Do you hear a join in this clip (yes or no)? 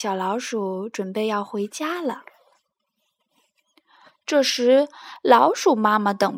no